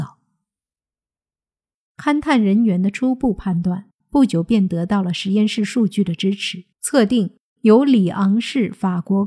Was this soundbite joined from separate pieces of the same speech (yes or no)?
yes